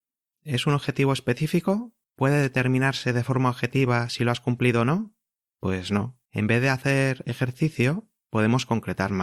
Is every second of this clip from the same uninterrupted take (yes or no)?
no